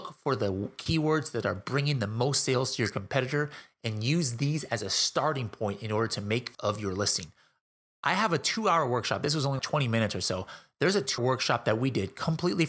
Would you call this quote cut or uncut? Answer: cut